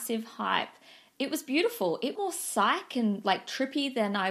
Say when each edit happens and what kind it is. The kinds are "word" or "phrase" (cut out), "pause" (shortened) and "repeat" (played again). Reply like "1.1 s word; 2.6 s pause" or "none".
2.2 s phrase